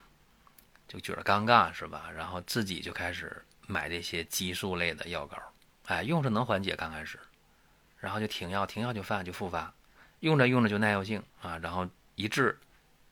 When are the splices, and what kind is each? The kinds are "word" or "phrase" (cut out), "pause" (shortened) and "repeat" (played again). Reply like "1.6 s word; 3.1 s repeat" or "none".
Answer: 5.7 s pause; 11.3 s pause